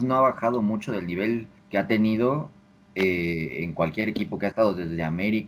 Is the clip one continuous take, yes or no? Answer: no